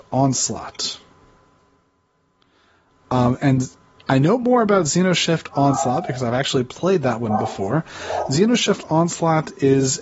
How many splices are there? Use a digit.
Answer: 0